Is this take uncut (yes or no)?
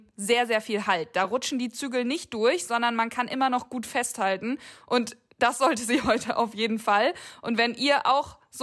yes